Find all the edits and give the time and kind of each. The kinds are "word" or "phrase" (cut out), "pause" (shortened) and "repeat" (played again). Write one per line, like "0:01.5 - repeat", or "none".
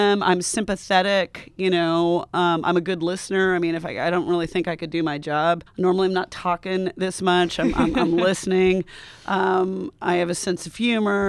0:05.7 - pause